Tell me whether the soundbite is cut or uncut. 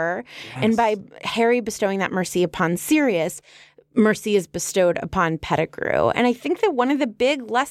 uncut